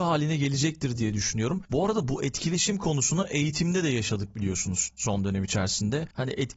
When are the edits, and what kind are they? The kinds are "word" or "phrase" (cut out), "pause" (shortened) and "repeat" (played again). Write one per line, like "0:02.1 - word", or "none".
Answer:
none